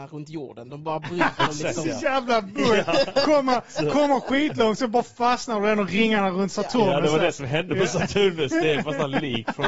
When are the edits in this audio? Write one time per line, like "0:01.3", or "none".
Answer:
none